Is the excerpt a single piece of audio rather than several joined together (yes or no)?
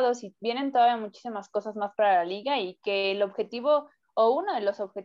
yes